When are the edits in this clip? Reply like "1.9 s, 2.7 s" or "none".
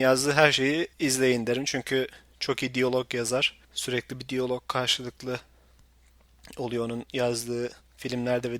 0.9 s, 3.6 s